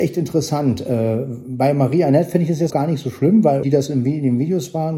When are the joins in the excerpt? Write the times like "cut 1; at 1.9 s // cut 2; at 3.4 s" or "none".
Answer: cut 1; at 2.7 s // cut 2; at 3.6 s